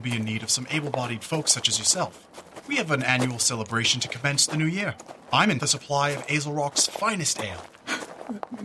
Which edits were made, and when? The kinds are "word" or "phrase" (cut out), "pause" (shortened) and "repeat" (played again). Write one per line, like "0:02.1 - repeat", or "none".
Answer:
0:05.6 - phrase